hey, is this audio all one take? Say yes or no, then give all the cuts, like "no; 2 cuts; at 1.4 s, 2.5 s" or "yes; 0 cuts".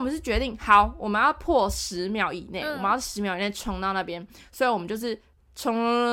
yes; 0 cuts